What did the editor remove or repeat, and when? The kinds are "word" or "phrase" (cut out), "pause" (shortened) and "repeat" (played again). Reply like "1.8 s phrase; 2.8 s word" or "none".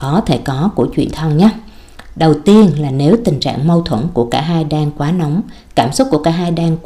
1.1 s word

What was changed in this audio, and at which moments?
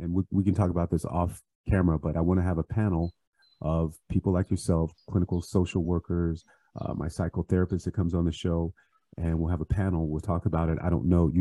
none

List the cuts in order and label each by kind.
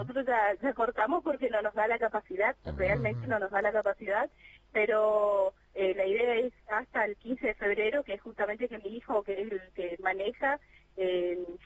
none

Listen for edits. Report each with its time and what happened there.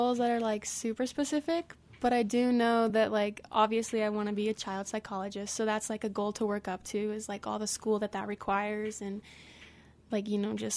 none

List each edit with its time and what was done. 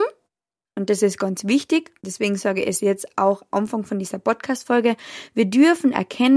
2.0 s pause; 3.5 s word

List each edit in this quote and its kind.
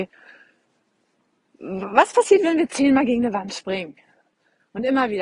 none

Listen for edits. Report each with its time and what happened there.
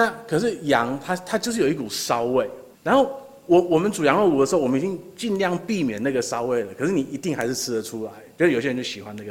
2.7 s pause

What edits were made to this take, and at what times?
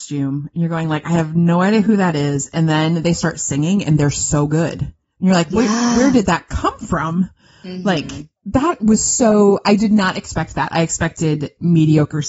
none

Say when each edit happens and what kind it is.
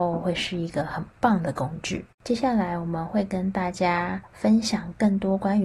2.1 s pause

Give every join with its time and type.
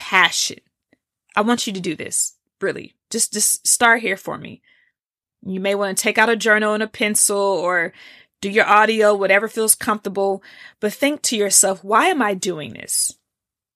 none

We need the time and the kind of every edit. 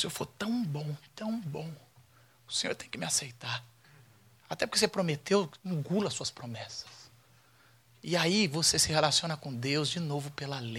none

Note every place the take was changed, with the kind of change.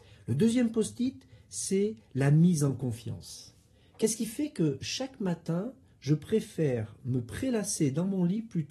none

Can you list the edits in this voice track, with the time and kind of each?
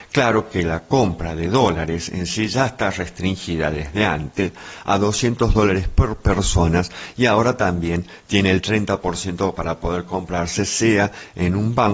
none

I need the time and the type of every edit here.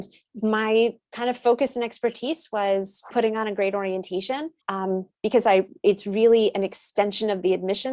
3.1 s phrase; 4.6 s pause

